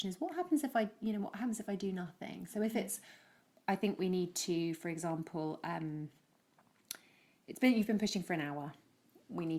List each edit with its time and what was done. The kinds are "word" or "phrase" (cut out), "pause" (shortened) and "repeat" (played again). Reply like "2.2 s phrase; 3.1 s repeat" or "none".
none